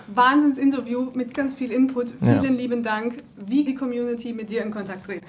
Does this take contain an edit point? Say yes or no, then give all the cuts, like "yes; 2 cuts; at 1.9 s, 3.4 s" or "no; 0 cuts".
yes; 2 cuts; at 1.3 s, 3.7 s